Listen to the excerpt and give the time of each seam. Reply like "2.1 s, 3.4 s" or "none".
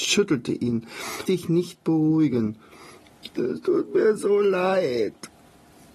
1.3 s